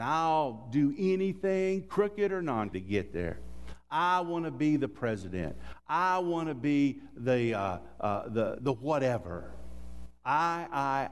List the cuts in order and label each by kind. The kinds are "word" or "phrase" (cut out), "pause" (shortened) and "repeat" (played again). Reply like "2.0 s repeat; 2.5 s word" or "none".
2.7 s word; 8.6 s word